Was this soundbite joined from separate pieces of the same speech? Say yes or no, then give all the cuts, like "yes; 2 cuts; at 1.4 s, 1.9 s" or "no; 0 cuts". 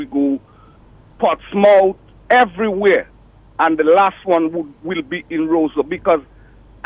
no; 0 cuts